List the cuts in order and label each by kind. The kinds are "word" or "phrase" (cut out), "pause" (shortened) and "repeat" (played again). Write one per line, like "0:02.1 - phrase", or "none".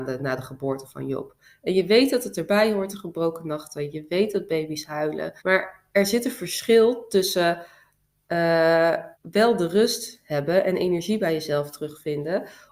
0:05.4 - pause
0:09.1 - pause